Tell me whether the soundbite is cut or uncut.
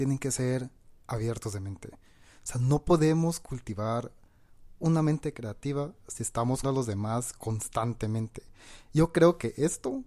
cut